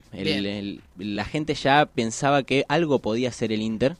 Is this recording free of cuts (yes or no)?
yes